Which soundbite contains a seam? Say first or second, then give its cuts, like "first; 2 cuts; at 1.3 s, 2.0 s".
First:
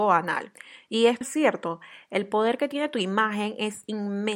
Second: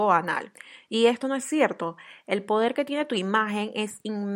first; 1 cut; at 1.2 s